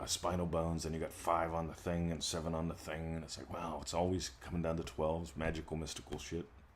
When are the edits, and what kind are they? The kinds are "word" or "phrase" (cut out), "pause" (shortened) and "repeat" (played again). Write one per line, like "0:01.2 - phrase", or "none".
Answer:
none